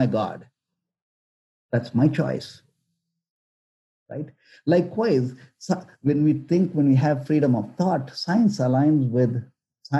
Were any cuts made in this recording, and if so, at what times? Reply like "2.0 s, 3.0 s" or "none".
none